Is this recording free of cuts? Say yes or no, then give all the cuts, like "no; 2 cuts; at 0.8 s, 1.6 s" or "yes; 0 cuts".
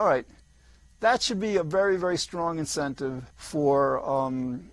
no; 1 cut; at 3.3 s